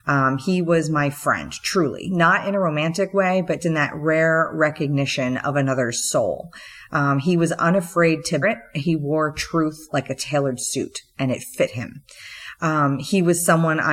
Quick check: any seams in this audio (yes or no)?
yes